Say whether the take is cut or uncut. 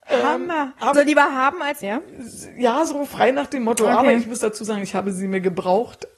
cut